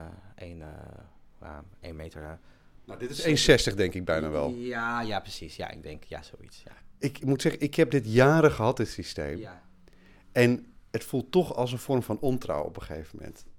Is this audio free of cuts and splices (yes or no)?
yes